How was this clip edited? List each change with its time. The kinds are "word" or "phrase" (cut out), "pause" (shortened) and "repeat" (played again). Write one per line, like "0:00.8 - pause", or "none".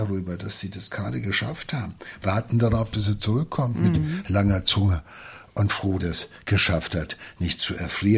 0:06.0 - word